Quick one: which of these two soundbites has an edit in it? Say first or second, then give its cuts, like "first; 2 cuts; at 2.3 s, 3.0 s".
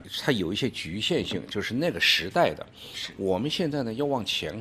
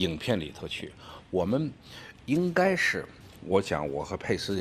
second; 1 cut; at 2.2 s